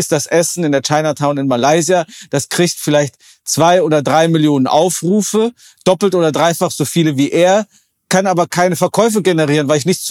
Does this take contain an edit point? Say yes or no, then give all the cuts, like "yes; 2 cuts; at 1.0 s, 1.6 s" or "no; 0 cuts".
no; 0 cuts